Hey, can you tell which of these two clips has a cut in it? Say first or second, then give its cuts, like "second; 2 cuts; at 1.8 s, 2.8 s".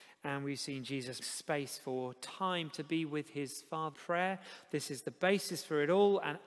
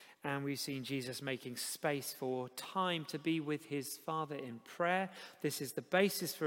first; 2 cuts; at 1.2 s, 3.9 s